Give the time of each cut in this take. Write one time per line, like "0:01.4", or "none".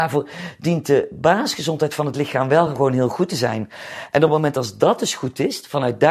none